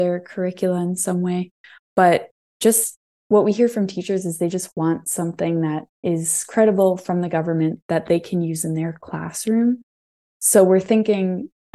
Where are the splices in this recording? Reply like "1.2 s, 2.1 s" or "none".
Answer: none